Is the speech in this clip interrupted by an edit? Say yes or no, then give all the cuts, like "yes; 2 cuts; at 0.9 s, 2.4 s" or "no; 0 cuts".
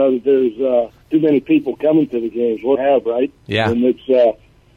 yes; 2 cuts; at 1.0 s, 2.7 s